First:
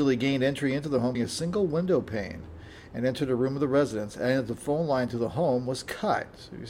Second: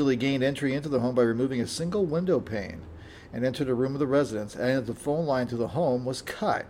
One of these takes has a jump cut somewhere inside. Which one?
first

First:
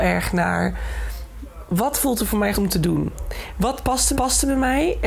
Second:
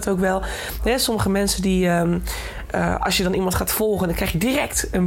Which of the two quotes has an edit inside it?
first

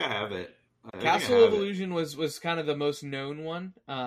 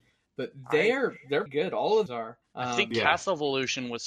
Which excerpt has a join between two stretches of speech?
second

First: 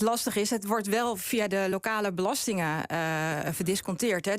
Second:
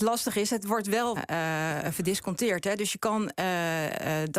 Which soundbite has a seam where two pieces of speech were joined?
second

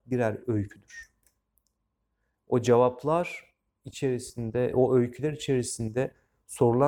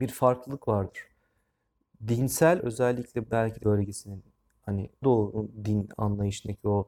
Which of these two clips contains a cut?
second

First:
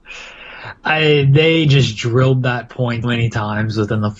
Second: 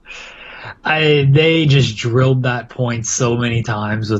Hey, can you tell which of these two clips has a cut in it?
first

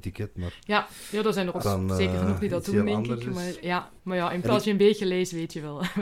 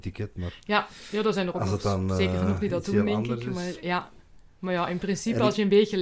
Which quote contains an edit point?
first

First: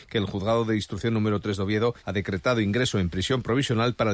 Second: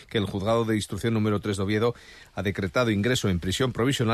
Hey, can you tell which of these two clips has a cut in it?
first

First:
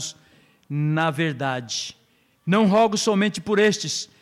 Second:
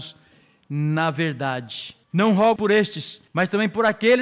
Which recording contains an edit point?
second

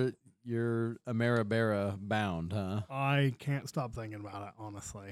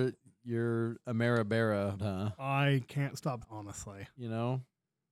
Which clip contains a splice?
second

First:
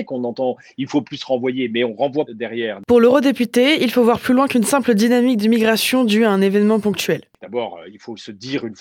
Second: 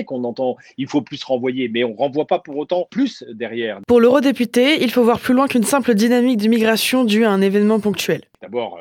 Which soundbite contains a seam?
first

